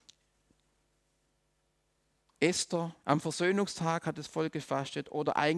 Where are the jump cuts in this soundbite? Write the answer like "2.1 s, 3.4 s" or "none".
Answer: 3.0 s